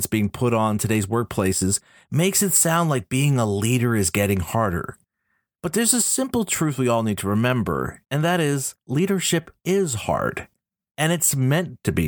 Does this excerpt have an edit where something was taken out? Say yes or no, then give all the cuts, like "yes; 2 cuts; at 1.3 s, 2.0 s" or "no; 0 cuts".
yes; 2 cuts; at 8.0 s, 8.8 s